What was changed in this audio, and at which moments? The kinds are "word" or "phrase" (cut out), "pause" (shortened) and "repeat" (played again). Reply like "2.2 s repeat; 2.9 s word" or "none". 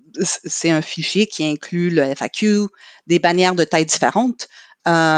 none